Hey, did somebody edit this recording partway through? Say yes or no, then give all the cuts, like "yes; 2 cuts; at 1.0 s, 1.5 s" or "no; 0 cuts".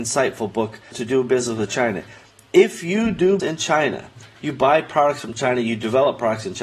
yes; 2 cuts; at 0.9 s, 3.4 s